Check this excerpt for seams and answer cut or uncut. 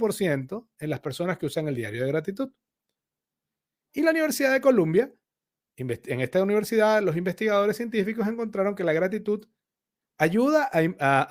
uncut